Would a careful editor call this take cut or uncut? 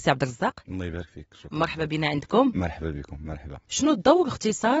cut